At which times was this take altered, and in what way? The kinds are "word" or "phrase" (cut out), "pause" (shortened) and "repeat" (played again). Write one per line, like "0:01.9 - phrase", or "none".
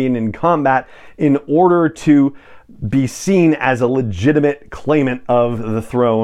none